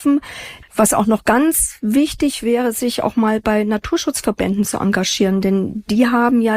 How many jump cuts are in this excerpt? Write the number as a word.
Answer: zero